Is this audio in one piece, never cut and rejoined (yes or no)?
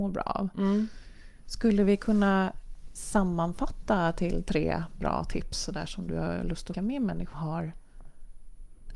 no